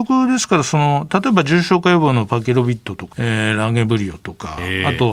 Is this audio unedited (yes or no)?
no